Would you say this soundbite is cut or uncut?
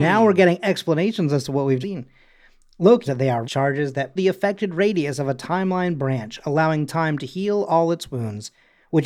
cut